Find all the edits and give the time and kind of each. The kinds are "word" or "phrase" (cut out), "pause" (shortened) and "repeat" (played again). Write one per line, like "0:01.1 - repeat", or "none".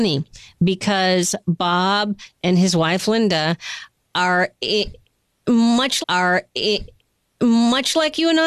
0:06.0 - repeat